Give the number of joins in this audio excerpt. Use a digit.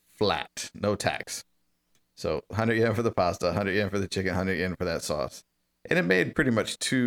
0